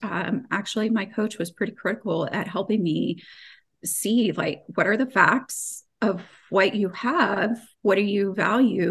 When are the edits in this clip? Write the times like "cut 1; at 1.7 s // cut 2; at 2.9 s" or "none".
none